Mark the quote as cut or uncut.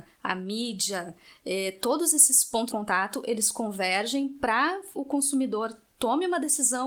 cut